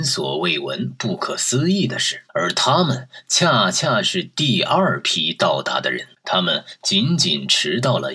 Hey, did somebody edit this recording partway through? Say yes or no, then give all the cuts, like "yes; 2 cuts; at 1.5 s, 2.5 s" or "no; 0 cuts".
yes; 2 cuts; at 2.3 s, 6.1 s